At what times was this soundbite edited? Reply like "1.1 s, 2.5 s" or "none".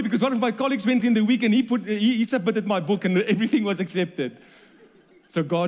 1.0 s